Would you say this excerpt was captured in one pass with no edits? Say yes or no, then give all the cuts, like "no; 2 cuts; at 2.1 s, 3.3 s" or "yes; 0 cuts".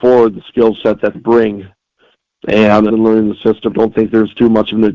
no; 3 cuts; at 1.1 s, 2.9 s, 3.7 s